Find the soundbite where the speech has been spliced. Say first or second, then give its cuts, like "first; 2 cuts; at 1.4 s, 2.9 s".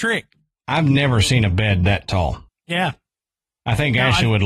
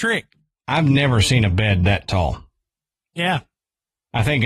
first; 1 cut; at 2.5 s